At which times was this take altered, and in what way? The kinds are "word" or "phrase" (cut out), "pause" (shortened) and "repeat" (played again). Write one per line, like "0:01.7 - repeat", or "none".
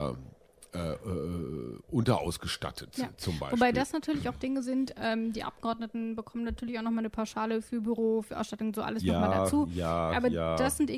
none